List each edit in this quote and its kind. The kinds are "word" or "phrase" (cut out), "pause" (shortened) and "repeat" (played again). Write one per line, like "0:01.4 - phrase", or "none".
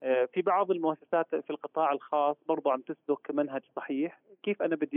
none